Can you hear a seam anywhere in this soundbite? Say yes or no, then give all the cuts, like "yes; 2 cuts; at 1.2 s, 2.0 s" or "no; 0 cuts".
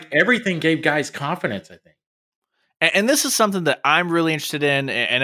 no; 0 cuts